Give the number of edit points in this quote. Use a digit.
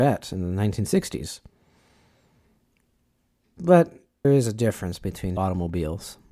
2